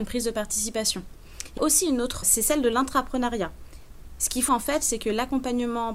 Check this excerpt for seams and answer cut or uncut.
cut